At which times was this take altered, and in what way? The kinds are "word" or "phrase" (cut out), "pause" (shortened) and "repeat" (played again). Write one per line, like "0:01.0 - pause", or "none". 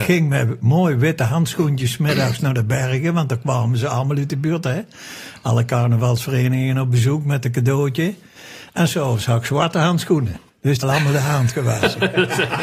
0:10.5 - pause
0:10.8 - phrase